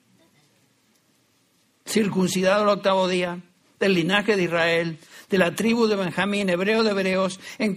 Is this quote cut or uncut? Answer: uncut